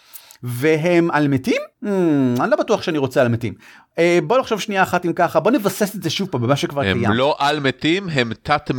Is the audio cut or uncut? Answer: cut